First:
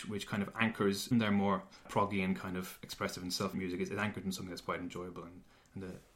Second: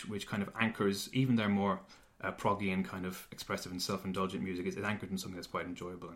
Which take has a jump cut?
first; 3 cuts; at 1.1 s, 1.9 s, 3.5 s

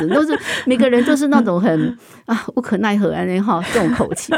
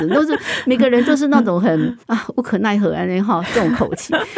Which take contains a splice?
second; 1 cut; at 2.0 s

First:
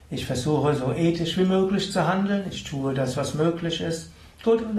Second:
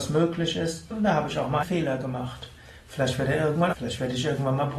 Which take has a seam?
second; 3 cuts; at 0.9 s, 1.6 s, 3.7 s

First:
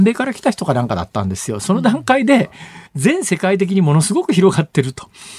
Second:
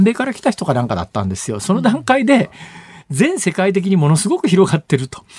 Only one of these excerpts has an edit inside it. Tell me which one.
first; 1 cut; at 2.9 s

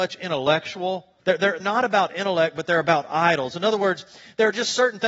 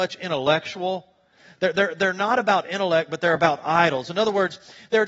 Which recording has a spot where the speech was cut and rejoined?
first; 2 cuts; at 1.2 s, 1.6 s

